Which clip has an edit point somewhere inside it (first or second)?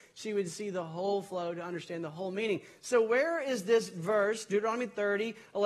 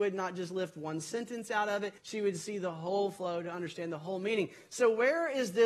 second